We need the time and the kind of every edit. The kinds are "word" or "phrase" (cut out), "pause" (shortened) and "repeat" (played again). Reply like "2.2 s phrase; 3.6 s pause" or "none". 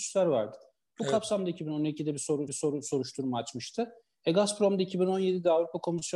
2.5 s repeat

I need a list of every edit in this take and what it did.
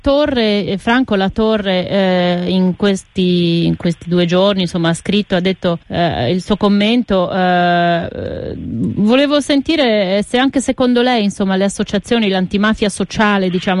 5.8 s pause

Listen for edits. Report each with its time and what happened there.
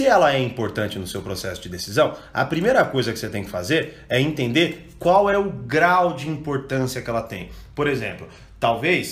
none

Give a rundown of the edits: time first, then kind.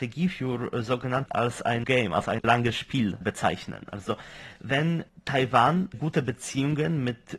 1.3 s word; 1.8 s word; 5.9 s word

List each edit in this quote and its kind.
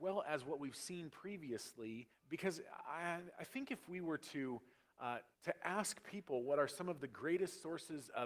2.1 s pause; 5.3 s pause

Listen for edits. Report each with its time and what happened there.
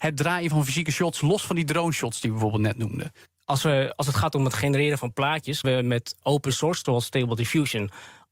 5.6 s word; 6.2 s word; 6.8 s word

